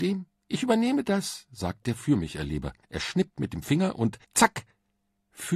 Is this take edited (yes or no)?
yes